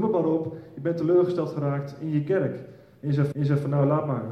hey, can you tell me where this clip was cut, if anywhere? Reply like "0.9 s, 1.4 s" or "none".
3.3 s